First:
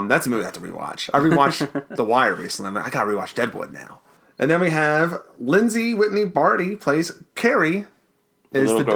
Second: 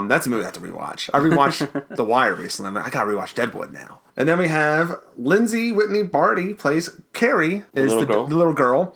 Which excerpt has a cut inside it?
second; 2 cuts; at 4.1 s, 7.7 s

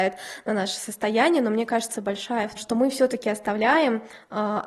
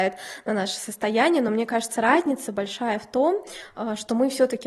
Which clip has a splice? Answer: first; 2 cuts; at 1.9 s, 2.6 s

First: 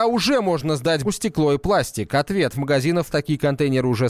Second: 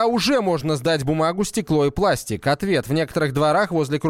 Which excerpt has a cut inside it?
first; 3 cuts; at 1.0 s, 2.5 s, 3.1 s

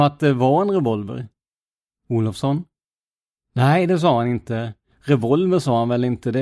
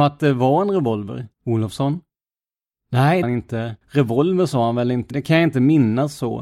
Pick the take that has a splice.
second; 4 cuts; at 1.3 s, 3.2 s, 3.8 s, 5.1 s

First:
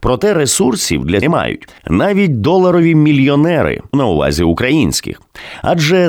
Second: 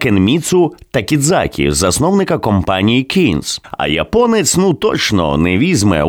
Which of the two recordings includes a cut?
first; 3 cuts; at 1.2 s, 1.8 s, 3.9 s

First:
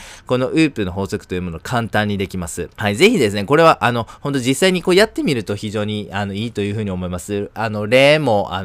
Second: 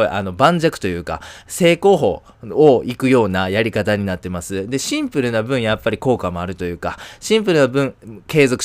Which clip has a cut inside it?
first; 1 cut; at 2.7 s

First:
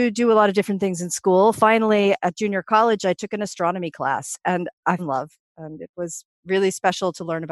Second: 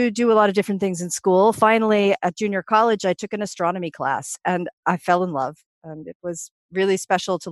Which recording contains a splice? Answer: first; 1 cut; at 5.0 s

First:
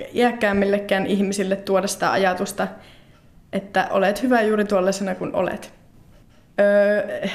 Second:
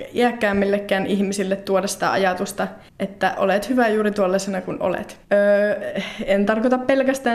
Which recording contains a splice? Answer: second; 2 cuts; at 2.9 s, 5.2 s

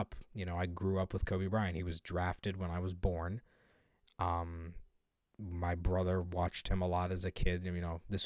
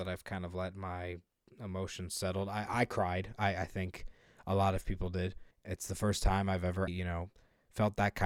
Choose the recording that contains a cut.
second; 2 cuts; at 5.5 s, 6.9 s

